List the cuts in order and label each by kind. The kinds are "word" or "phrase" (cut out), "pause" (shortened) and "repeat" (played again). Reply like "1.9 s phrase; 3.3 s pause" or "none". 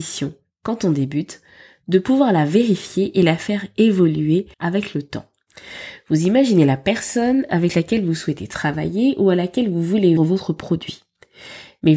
4.5 s pause; 10.2 s word